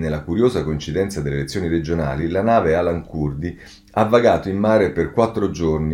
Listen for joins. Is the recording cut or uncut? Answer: uncut